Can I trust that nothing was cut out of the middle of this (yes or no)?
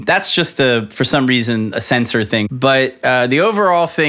yes